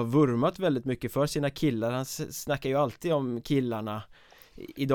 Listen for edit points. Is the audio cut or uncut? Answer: uncut